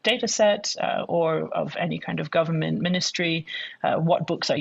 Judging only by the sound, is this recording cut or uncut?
uncut